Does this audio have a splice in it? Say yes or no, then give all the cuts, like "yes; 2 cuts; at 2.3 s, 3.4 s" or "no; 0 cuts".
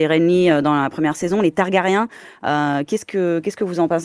no; 0 cuts